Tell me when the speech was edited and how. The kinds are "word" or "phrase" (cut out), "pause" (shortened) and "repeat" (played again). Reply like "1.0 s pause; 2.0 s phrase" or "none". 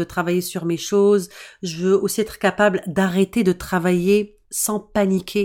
4.4 s pause